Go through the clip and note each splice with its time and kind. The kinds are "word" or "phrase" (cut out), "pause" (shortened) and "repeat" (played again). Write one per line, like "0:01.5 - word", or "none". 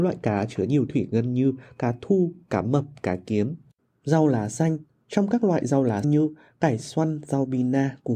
0:06.0 - word